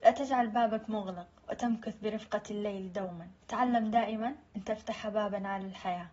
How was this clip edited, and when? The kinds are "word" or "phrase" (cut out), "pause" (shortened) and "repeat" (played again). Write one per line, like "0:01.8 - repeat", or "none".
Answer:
0:01.4 - pause
0:03.4 - pause
0:04.5 - pause